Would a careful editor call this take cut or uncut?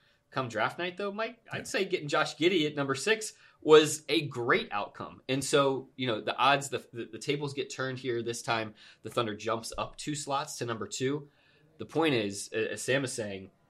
uncut